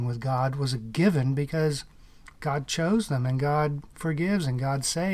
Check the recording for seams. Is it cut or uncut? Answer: uncut